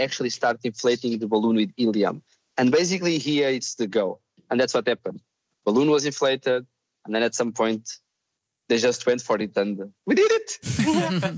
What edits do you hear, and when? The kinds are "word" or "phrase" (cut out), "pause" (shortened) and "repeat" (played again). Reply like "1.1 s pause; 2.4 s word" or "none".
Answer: 10.0 s pause